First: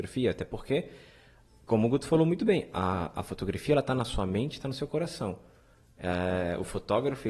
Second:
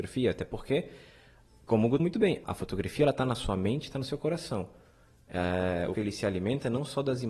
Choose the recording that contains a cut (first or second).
second